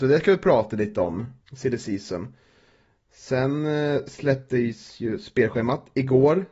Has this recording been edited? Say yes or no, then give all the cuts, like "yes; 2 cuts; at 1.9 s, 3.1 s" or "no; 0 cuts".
yes; 1 cut; at 1.4 s